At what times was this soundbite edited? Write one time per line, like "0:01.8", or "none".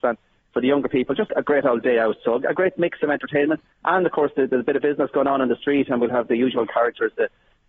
0:01.3
0:03.7